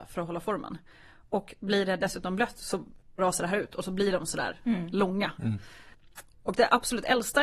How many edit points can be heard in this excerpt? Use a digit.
1